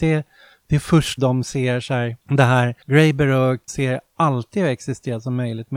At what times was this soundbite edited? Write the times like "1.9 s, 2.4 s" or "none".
1.2 s, 2.2 s, 2.8 s, 3.7 s